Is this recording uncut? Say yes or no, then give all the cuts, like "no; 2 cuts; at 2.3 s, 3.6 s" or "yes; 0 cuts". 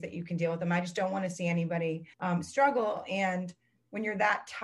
no; 1 cut; at 2.1 s